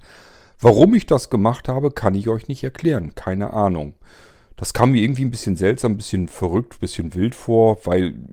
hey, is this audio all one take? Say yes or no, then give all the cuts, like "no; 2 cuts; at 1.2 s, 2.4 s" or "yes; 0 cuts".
yes; 0 cuts